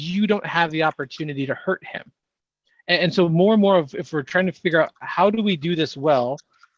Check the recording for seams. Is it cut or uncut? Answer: uncut